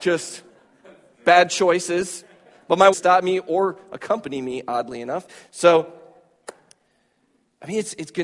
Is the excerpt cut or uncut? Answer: cut